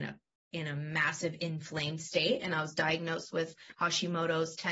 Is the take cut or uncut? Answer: uncut